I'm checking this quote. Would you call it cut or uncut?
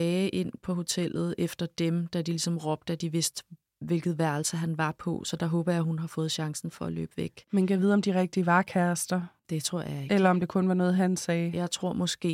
uncut